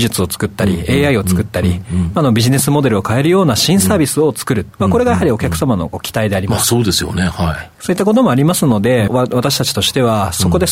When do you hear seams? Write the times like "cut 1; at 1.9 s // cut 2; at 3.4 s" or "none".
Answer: cut 1; at 4.7 s // cut 2; at 7.7 s // cut 3; at 9.1 s